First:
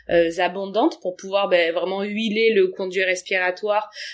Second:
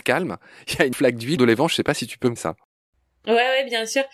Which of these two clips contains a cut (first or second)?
second